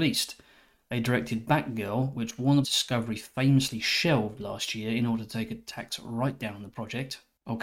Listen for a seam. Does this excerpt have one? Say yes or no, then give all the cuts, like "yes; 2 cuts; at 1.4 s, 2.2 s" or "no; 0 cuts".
yes; 1 cut; at 2.6 s